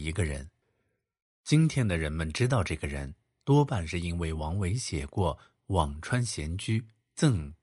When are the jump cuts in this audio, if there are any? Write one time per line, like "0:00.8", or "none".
none